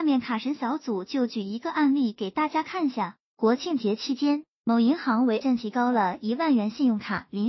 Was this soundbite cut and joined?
yes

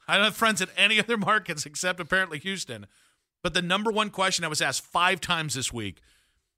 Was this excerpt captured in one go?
yes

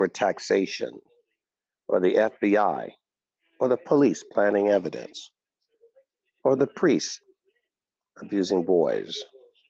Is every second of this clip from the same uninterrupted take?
yes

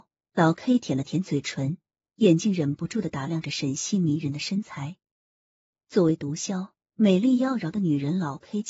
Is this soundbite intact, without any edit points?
yes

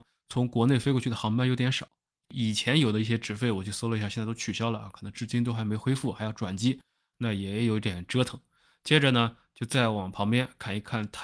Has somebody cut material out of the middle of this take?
no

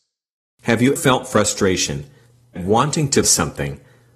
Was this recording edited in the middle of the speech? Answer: yes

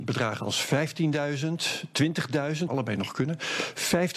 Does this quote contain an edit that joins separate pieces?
yes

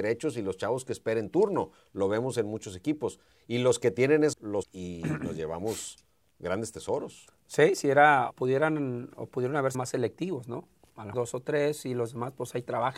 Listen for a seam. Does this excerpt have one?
yes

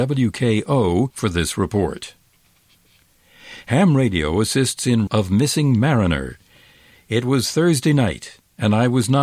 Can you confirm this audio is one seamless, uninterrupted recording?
no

